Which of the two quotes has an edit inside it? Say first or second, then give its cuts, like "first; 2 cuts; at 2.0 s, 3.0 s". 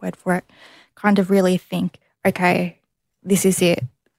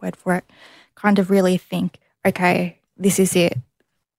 second; 1 cut; at 2.9 s